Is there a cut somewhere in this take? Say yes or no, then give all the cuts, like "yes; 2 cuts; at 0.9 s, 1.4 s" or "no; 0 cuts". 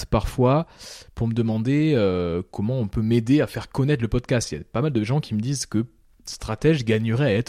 yes; 1 cut; at 2.5 s